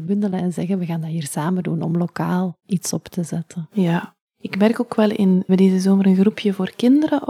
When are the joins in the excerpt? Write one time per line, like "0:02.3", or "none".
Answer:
0:05.5